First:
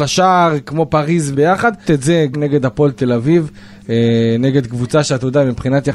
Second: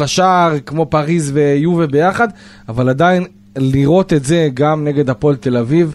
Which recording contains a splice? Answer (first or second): first